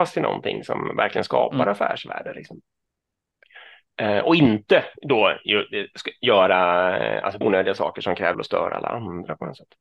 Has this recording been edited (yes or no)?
yes